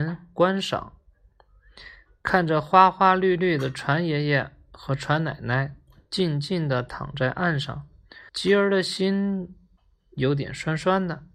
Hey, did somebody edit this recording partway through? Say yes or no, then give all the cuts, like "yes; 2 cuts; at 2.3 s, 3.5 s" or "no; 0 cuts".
yes; 1 cut; at 8.3 s